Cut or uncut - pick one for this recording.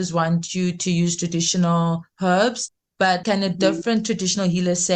uncut